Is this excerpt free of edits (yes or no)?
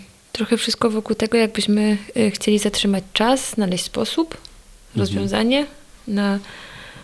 yes